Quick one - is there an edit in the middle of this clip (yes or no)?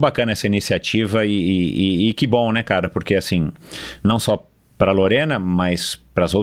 no